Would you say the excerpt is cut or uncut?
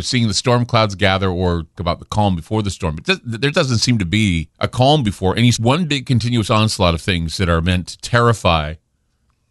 cut